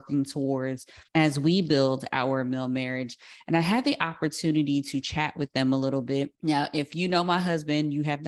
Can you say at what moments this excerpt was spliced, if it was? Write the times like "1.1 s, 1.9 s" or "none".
1.1 s, 6.3 s